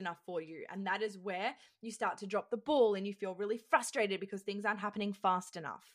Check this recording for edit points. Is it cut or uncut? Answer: uncut